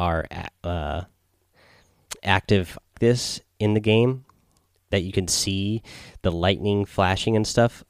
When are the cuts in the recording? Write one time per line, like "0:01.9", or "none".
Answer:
0:02.9